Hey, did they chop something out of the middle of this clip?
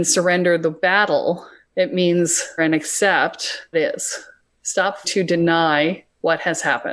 yes; 3 cuts; at 2.6 s, 3.7 s, 5.0 s

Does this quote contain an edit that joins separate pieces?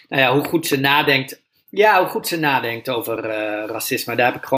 no; 0 cuts

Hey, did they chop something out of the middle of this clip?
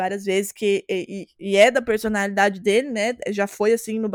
no; 0 cuts

